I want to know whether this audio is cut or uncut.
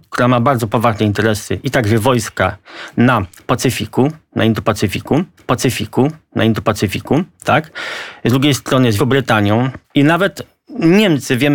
cut